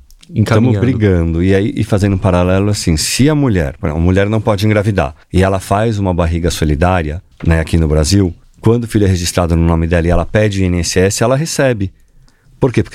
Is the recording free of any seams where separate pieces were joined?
no; 3 cuts; at 5.2 s, 7.3 s, 8.4 s

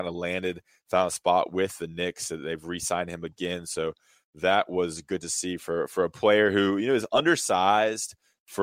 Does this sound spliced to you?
no; 0 cuts

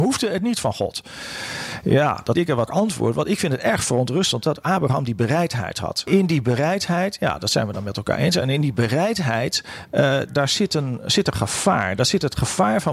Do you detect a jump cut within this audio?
yes; 3 cuts; at 2.3 s, 2.7 s, 10.3 s

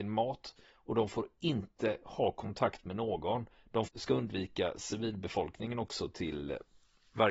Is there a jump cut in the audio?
yes; 1 cut; at 3.9 s

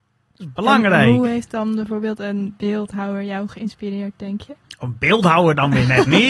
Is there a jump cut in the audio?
no; 0 cuts

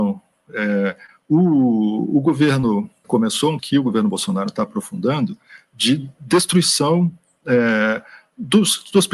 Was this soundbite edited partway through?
yes; 2 cuts; at 3.0 s, 3.6 s

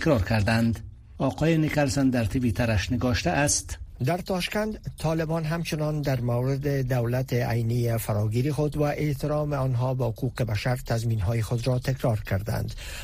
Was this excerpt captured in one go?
yes; 0 cuts

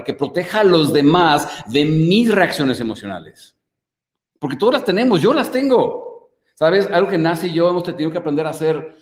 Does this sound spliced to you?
no; 0 cuts

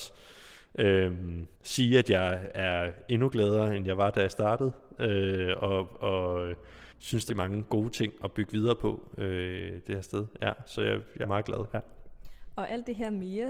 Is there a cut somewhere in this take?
yes; 4 cuts; at 1.5 s, 6.9 s, 7.3 s, 11.2 s

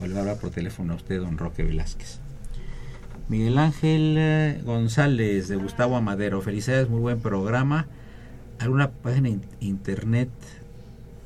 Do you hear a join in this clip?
no; 0 cuts

